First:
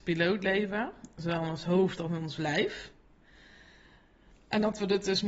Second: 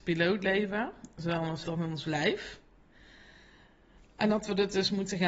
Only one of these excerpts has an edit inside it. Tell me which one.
second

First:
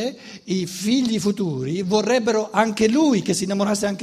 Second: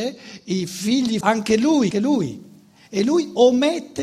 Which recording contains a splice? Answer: second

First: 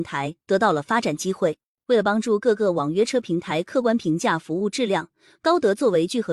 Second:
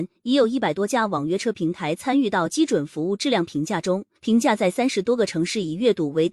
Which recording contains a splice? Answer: second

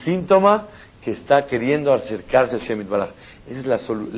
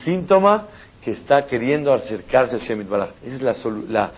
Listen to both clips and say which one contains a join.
second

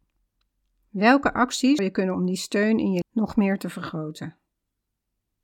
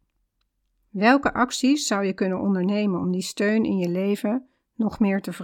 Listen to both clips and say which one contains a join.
first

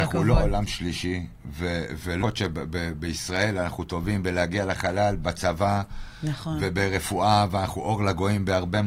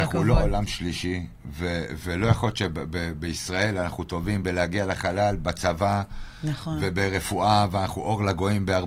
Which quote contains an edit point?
first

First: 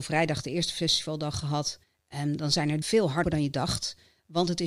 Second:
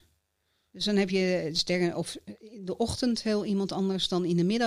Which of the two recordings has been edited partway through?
first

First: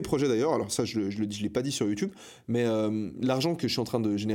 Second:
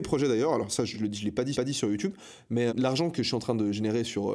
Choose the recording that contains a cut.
second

